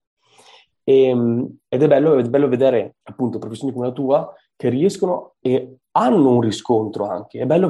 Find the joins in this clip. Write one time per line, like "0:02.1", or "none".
0:03.0
0:05.4